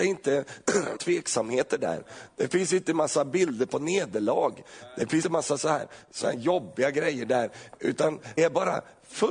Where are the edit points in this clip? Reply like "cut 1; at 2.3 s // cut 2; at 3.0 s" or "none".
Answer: cut 1; at 1.0 s // cut 2; at 5.2 s // cut 3; at 8.4 s